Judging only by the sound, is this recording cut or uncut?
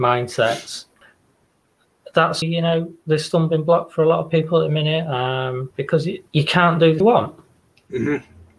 cut